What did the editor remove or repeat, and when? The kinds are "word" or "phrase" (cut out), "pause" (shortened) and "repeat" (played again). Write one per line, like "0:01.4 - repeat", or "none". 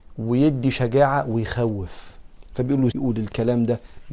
0:02.9 - word